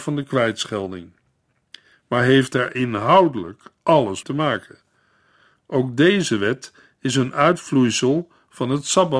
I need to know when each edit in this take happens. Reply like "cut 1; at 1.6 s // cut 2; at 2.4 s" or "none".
cut 1; at 4.2 s